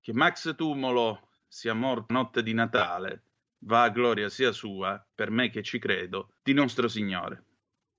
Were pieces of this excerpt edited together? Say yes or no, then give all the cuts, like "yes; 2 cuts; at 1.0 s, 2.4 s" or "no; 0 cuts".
yes; 4 cuts; at 2.1 s, 3.4 s, 5.1 s, 6.4 s